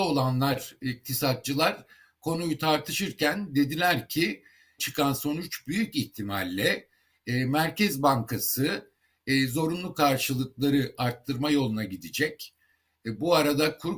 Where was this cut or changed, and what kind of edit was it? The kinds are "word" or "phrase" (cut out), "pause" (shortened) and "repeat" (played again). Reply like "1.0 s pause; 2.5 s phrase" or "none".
4.8 s word